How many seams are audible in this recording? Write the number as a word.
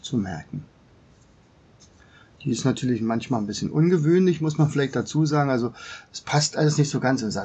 zero